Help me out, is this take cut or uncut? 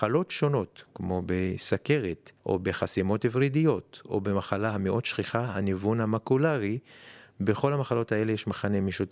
cut